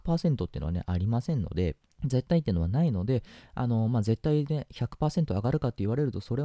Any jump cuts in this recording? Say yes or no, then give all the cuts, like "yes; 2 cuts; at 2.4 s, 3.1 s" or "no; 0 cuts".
yes; 1 cut; at 1.9 s